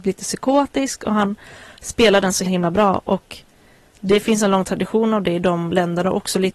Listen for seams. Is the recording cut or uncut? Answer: cut